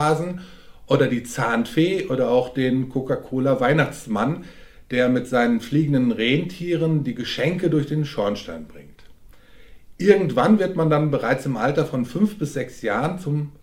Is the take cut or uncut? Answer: uncut